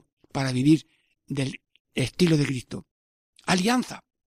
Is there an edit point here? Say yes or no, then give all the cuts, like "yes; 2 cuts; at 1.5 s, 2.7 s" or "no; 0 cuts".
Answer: no; 0 cuts